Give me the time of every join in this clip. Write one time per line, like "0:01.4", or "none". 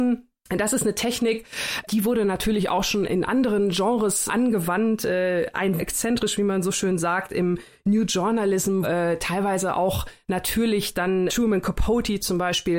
0:03.0
0:04.3
0:05.8
0:08.8
0:11.3